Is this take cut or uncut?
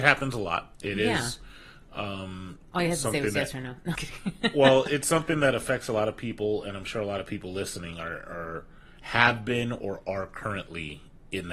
cut